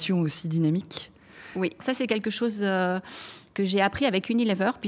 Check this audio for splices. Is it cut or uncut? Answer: cut